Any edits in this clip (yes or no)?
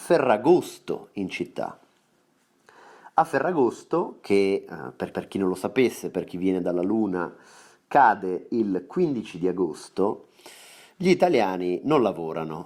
yes